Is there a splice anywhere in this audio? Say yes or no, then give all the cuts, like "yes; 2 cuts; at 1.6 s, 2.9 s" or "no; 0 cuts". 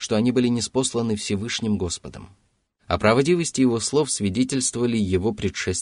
no; 0 cuts